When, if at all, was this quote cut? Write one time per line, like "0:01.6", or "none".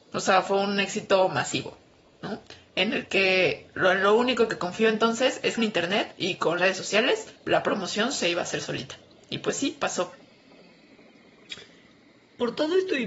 0:05.6
0:06.6
0:07.4